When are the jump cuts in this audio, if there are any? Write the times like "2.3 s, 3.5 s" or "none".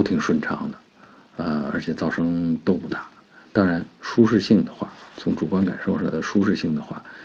none